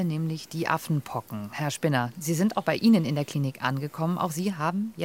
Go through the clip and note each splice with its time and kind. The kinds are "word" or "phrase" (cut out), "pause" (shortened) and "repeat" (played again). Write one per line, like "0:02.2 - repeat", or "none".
none